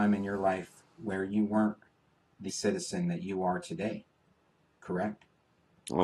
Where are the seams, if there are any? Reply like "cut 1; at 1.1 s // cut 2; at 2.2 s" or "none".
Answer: cut 1; at 2.5 s